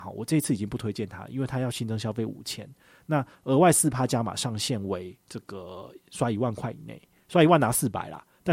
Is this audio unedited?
yes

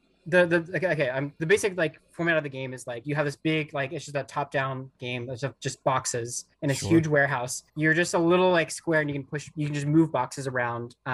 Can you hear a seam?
yes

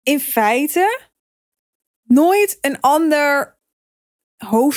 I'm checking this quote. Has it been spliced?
no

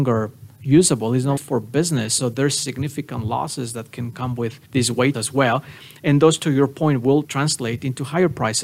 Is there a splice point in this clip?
yes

